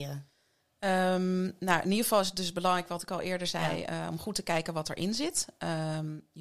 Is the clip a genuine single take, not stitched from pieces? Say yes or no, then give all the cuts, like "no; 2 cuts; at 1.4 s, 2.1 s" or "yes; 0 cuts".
yes; 0 cuts